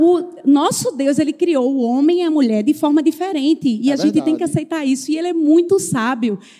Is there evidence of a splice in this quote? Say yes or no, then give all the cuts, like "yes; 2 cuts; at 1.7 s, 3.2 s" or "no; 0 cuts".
no; 0 cuts